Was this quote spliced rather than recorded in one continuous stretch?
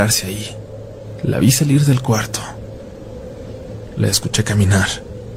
no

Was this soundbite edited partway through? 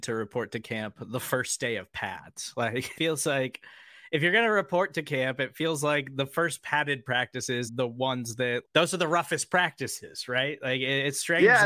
yes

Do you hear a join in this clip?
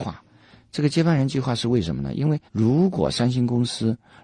yes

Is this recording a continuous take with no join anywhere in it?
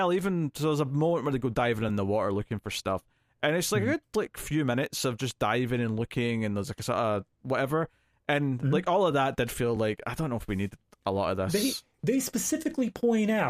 yes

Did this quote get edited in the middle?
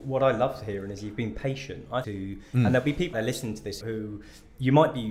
yes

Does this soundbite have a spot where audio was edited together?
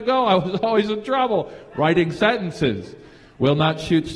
no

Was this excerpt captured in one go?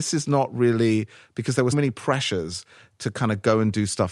no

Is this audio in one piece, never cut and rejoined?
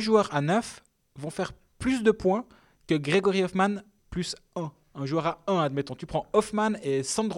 yes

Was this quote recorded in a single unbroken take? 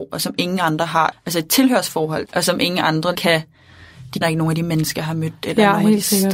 no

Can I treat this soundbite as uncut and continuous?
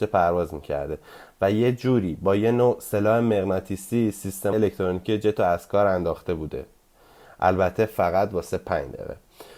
no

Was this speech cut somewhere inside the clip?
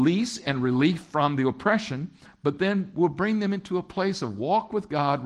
no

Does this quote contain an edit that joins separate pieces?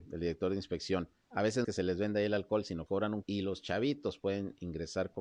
yes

